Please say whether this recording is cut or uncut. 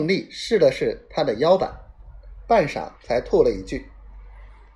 cut